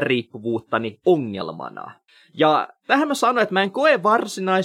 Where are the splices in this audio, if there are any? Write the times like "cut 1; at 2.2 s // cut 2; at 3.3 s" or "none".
cut 1; at 2.1 s